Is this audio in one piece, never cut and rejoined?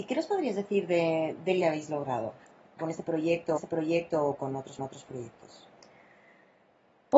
no; 4 cuts; at 1.6 s, 2.8 s, 3.6 s, 4.8 s

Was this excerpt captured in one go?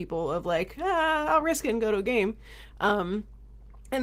yes; 0 cuts

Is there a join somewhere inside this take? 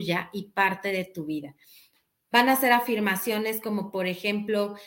no; 0 cuts

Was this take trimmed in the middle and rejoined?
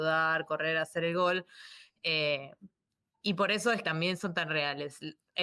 yes; 1 cut; at 3.8 s

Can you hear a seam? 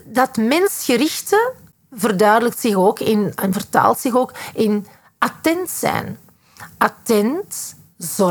no; 0 cuts

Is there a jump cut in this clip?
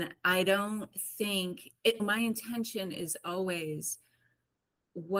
yes; 1 cut; at 2.0 s

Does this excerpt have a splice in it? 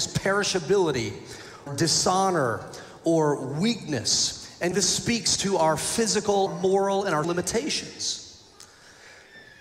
yes; 4 cuts; at 1.7 s, 4.7 s, 6.5 s, 7.2 s

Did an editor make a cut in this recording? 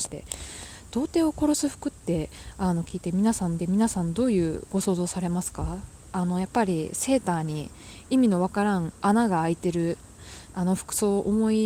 yes; 2 cuts; at 3.6 s, 10.5 s

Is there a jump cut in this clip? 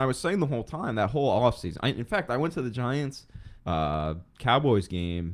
yes; 1 cut; at 3.6 s

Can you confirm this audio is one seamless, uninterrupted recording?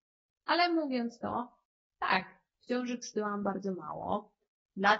yes; 0 cuts

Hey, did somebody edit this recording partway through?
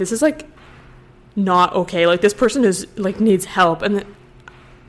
no; 0 cuts

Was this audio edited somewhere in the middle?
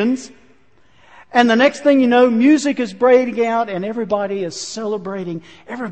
no; 0 cuts

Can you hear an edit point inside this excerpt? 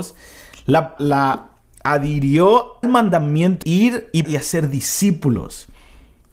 yes; 4 cuts; at 1.0 s, 2.8 s, 3.6 s, 4.2 s

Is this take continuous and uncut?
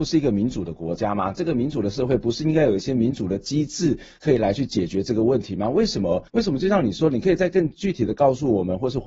no; 1 cut; at 6.3 s

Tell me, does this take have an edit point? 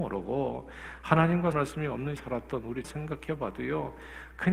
yes; 3 cuts; at 1.5 s, 2.2 s, 2.8 s

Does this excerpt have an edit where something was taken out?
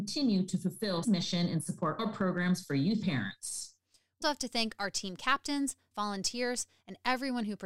yes; 5 cuts; at 1.0 s, 2.0 s, 3.0 s, 4.2 s, 5.9 s

